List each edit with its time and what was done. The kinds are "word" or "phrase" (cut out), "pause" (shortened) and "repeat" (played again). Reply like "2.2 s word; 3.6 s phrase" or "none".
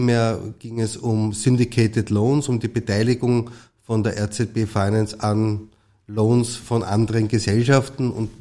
none